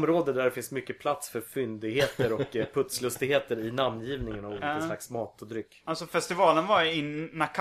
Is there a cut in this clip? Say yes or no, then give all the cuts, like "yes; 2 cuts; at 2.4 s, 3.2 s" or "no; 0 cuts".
no; 0 cuts